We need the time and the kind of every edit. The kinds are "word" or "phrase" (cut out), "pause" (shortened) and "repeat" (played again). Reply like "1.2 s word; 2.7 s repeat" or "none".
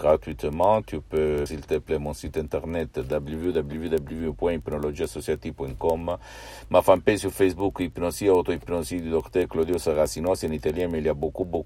1.5 s word